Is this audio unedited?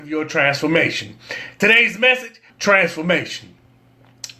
no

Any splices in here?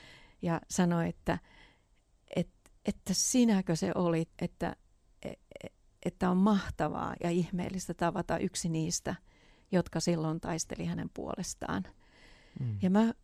yes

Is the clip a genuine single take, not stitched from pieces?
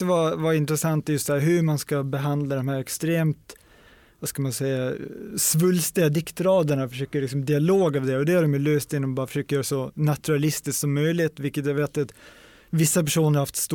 yes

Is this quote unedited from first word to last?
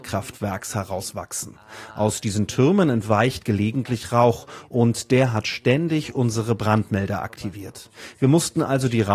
yes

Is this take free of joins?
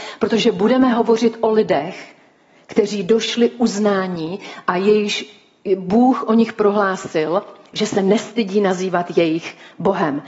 yes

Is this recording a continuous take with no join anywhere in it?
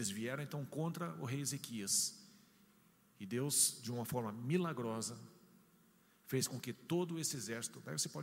yes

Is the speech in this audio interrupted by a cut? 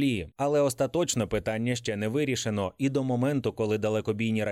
no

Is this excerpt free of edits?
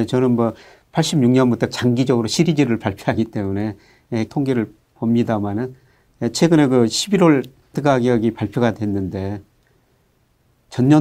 no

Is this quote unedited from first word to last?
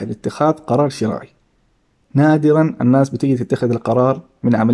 yes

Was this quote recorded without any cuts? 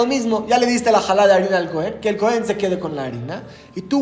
yes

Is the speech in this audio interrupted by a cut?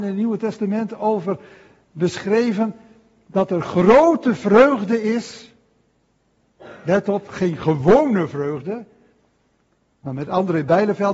no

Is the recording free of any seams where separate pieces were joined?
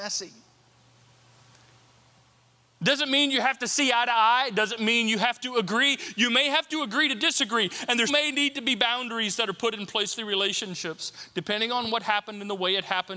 no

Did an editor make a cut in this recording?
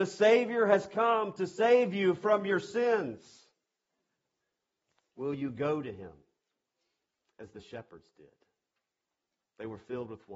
no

